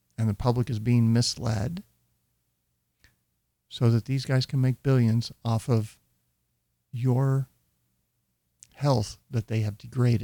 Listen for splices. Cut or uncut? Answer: uncut